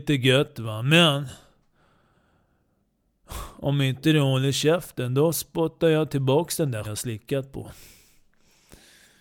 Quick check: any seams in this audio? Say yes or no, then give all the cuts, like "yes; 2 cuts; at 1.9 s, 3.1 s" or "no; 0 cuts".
yes; 1 cut; at 6.8 s